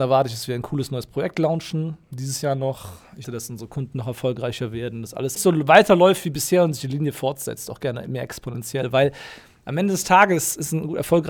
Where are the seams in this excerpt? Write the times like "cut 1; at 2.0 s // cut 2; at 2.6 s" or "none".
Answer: cut 1; at 3.2 s // cut 2; at 5.4 s